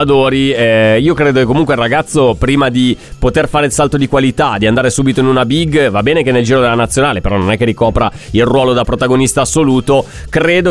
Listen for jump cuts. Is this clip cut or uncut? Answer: uncut